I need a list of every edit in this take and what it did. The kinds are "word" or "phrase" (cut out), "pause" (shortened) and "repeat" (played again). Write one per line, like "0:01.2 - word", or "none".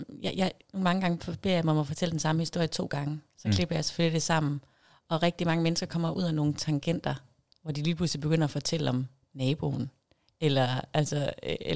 none